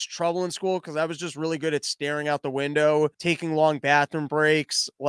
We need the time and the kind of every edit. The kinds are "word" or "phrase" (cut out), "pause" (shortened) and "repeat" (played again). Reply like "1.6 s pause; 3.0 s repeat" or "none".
3.1 s pause